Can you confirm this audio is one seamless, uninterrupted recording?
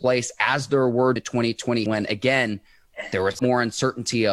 no; 3 cuts; at 1.2 s, 1.9 s, 3.4 s

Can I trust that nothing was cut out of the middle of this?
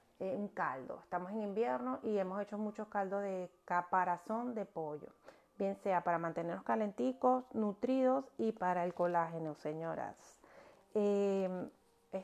yes; 0 cuts

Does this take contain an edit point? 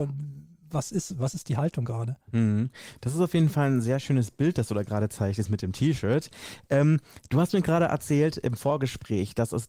no; 0 cuts

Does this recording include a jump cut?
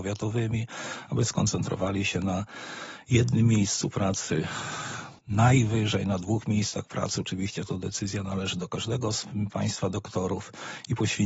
yes; 1 cut; at 5.2 s

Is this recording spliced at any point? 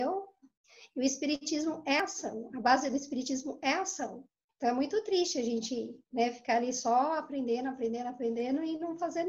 yes; 2 cuts; at 4.5 s, 6.0 s

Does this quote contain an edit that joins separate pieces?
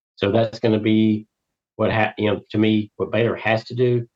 no; 0 cuts

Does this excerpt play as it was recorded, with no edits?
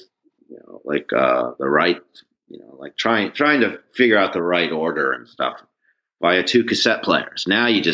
yes; 0 cuts

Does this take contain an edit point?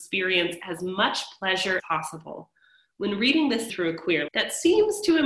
yes; 3 cuts; at 1.8 s, 3.7 s, 4.3 s

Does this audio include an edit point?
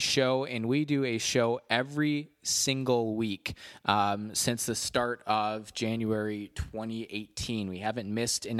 no; 0 cuts

